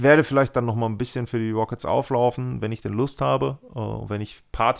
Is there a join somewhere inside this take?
no; 0 cuts

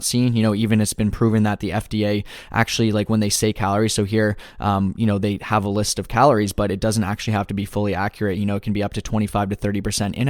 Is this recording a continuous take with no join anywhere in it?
yes; 0 cuts

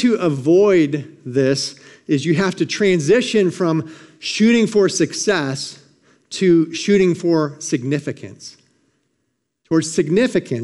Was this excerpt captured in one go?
yes; 0 cuts

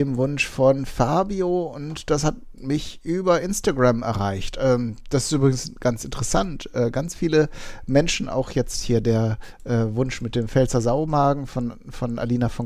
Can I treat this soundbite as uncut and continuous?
yes; 0 cuts

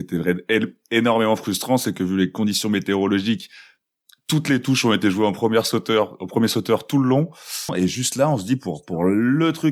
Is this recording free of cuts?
yes; 0 cuts

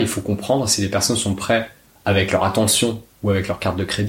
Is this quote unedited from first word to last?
yes; 0 cuts

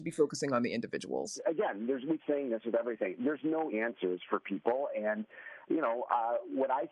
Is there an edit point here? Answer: yes; 2 cuts; at 2.2 s, 3.7 s

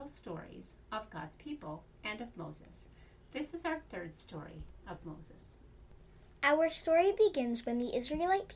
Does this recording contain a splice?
no; 0 cuts

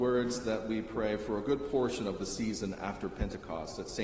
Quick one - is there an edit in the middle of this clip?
no; 0 cuts

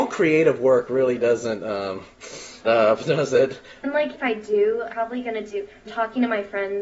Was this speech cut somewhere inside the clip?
yes; 4 cuts; at 2.6 s, 4.1 s, 4.9 s, 5.9 s

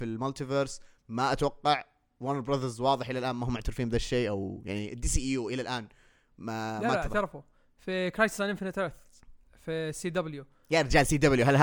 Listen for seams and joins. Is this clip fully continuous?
yes; 0 cuts

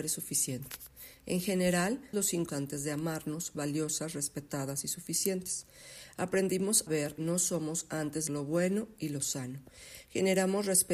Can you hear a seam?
yes; 6 cuts; at 2.1 s, 2.5 s, 3.5 s, 6.9 s, 7.2 s, 8.3 s

